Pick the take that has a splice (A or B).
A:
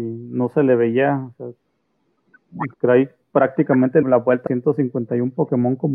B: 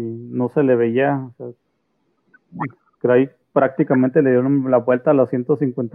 A